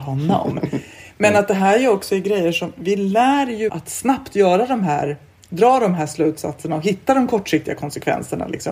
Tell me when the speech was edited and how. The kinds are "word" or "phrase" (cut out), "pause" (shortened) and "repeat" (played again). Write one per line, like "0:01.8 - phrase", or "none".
0:03.7 - word